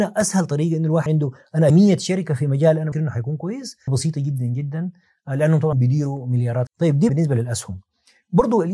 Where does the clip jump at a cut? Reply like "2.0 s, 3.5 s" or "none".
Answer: 1.1 s, 1.7 s, 2.9 s, 3.9 s, 5.7 s, 6.7 s, 7.1 s